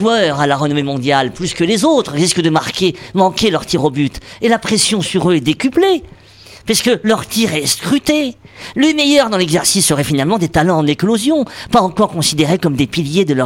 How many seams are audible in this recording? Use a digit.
0